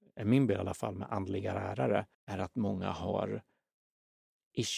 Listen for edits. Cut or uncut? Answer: cut